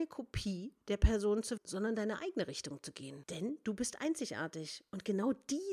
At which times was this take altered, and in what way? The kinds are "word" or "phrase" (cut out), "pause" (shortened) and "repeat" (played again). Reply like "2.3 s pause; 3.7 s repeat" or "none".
1.6 s word